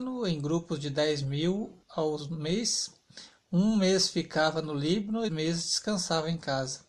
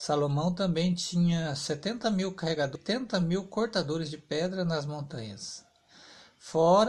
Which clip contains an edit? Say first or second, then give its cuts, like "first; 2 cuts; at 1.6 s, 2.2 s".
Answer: first; 2 cuts; at 1.8 s, 5.3 s